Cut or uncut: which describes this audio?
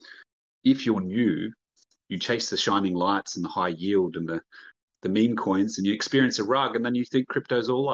uncut